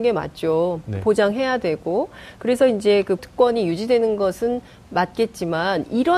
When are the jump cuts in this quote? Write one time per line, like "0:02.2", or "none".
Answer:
0:03.2

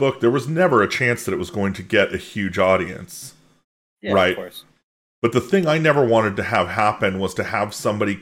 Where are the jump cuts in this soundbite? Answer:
none

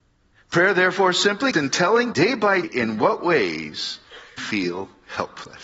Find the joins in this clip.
0:01.5
0:02.1
0:02.6
0:04.4

